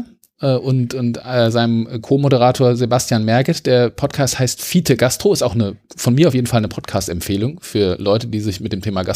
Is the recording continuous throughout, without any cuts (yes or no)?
yes